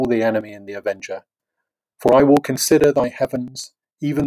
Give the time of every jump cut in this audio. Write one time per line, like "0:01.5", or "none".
none